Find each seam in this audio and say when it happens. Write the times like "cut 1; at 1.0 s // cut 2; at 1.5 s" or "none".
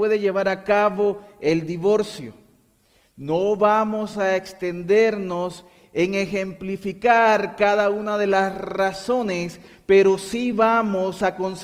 none